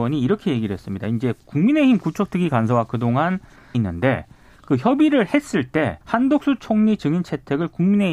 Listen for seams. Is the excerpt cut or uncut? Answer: cut